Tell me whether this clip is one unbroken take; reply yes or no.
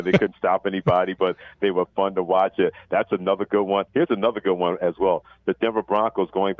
no